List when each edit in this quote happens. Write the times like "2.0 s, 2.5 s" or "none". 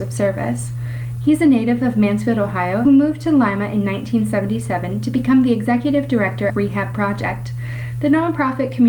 2.8 s, 6.5 s